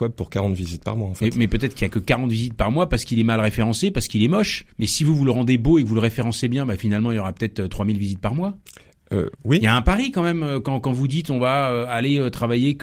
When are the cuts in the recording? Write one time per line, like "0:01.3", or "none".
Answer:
0:04.7
0:09.3